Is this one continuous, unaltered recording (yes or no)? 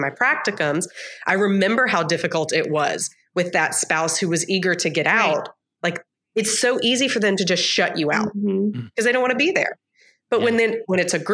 yes